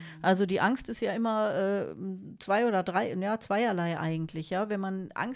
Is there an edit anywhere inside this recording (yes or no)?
no